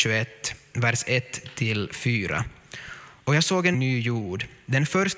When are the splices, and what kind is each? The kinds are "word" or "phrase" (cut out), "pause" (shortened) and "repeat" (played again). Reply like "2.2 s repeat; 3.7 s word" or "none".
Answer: 3.7 s phrase